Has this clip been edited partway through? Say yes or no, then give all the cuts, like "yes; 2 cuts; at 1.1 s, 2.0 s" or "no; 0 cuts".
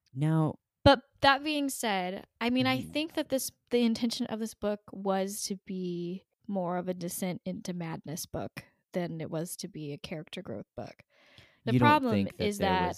no; 0 cuts